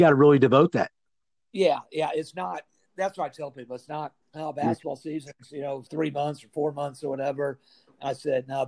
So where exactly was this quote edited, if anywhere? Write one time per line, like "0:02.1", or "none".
0:01.1
0:02.7
0:04.2
0:05.9